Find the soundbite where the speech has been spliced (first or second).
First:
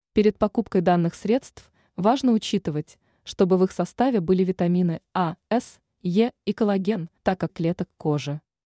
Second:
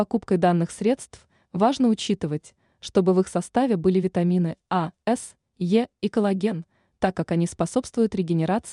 first